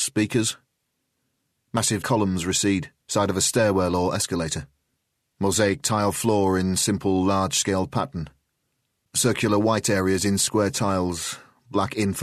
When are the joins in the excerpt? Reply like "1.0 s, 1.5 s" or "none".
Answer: 2.0 s, 3.0 s